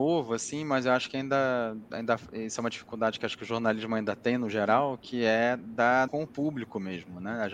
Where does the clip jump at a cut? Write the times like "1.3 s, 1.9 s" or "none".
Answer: 6.1 s